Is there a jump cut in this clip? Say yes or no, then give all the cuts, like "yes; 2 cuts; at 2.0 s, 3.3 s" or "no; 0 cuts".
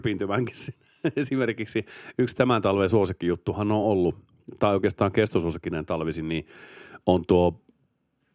no; 0 cuts